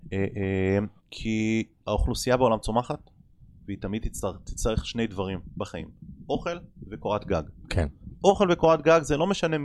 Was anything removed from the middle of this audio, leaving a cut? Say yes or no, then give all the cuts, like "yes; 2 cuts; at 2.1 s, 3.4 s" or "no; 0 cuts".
yes; 1 cut; at 1.0 s